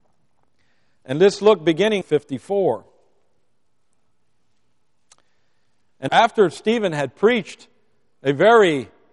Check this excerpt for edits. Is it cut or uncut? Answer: cut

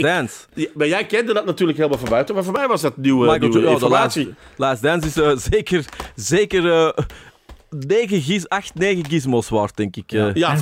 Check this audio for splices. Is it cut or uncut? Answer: uncut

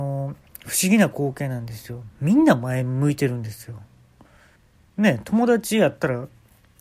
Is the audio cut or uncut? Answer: cut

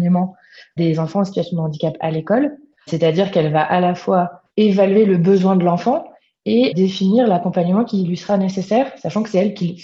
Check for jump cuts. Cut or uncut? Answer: uncut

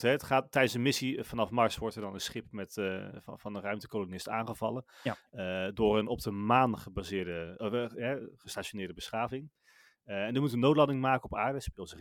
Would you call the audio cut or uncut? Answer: uncut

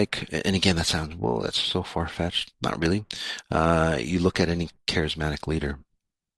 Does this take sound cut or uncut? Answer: uncut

